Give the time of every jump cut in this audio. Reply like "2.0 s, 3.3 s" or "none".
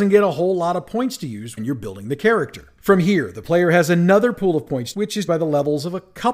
1.6 s, 4.9 s, 5.3 s